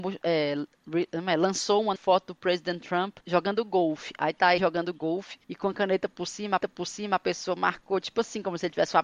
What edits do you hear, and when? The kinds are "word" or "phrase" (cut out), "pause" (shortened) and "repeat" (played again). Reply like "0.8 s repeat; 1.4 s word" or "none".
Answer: 2.0 s word; 3.2 s pause; 4.6 s word; 5.4 s pause; 6.6 s repeat